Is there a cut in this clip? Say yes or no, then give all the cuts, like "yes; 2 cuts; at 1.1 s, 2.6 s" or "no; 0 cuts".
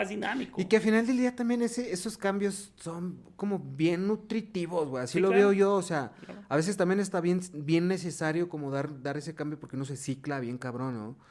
no; 0 cuts